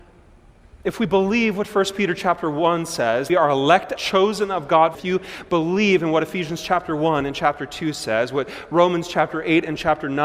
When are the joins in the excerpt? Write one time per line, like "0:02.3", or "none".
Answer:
0:03.3
0:04.0
0:04.9